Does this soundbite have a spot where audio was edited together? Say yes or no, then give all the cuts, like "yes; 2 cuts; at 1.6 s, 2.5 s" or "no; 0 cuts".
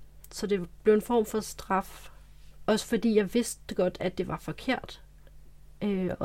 no; 0 cuts